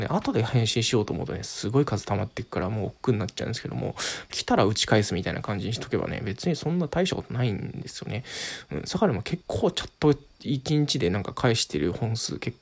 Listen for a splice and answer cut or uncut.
cut